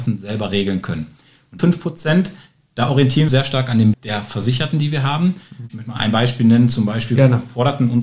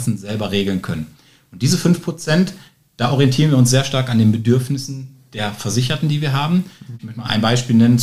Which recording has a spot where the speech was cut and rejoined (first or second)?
first